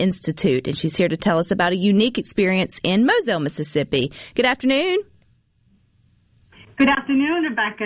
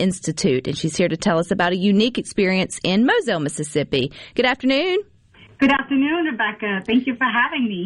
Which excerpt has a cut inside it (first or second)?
second